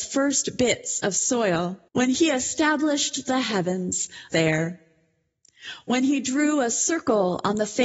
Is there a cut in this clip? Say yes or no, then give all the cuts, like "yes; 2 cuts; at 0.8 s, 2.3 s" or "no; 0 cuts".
yes; 2 cuts; at 1.9 s, 4.3 s